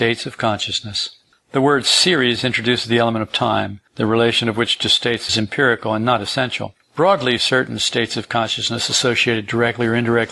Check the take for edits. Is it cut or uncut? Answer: cut